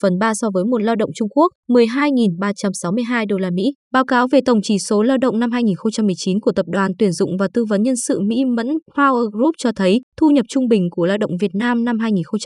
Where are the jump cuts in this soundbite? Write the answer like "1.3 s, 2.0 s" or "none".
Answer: 1.6 s, 3.8 s, 10.1 s

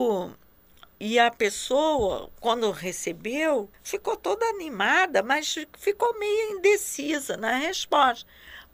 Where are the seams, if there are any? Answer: 3.7 s

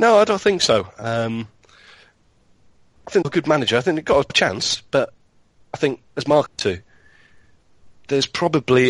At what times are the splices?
3.2 s, 4.3 s, 6.5 s

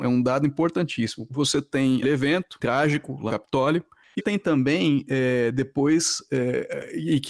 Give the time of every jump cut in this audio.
1.3 s, 2.0 s, 2.6 s, 3.3 s, 4.2 s

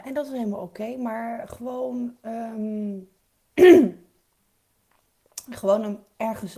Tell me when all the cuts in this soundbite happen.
none

